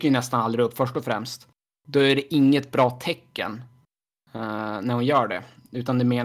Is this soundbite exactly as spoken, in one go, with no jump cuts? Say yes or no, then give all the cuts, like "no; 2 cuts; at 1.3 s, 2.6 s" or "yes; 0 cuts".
yes; 0 cuts